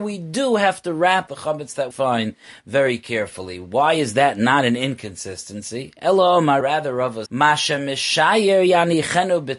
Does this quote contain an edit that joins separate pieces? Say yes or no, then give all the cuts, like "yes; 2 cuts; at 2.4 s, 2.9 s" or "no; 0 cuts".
yes; 4 cuts; at 1.3 s, 1.9 s, 6.6 s, 7.3 s